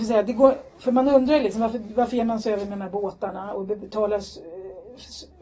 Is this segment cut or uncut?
uncut